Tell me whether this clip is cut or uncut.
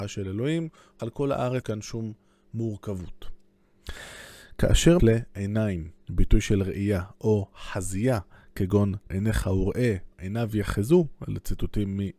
cut